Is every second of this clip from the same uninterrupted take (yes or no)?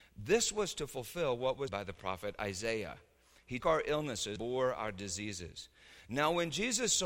no